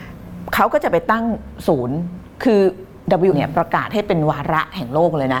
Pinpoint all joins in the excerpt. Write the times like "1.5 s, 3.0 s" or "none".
3.3 s